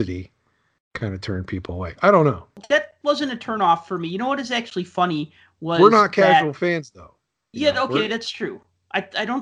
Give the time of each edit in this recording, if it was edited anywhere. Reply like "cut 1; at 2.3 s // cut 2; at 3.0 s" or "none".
none